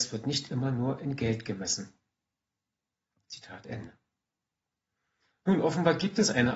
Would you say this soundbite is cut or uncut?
uncut